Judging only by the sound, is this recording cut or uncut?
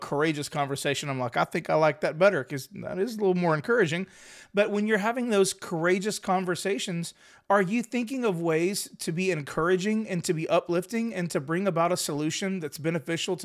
uncut